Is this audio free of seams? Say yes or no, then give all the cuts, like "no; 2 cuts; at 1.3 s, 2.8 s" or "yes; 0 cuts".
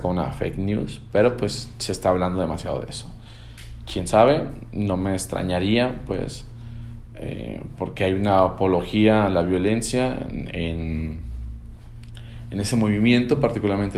yes; 0 cuts